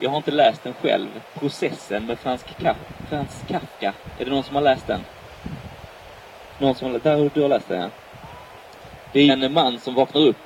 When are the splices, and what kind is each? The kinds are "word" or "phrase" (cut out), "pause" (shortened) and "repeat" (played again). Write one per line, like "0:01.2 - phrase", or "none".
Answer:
0:01.3 - pause
0:09.3 - word